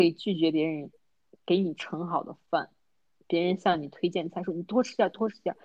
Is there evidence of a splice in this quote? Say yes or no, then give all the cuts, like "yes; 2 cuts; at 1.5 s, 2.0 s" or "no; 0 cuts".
no; 0 cuts